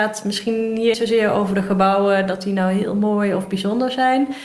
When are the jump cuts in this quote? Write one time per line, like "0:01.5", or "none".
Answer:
0:00.9